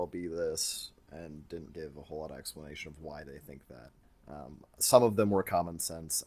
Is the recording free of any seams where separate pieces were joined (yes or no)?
no